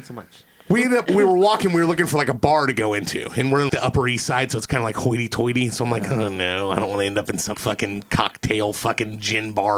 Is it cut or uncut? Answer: cut